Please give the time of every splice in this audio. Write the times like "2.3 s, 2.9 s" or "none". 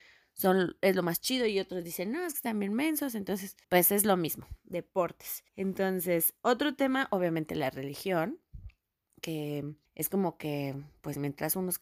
3.6 s, 5.5 s, 9.9 s